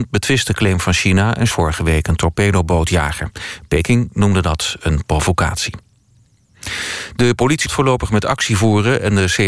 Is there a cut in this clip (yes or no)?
yes